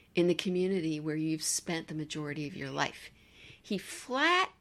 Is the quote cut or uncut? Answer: uncut